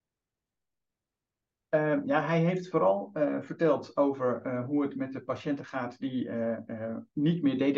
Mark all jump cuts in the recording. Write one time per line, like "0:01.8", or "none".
none